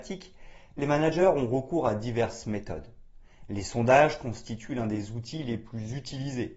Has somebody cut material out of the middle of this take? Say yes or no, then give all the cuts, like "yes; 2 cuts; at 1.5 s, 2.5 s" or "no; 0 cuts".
no; 0 cuts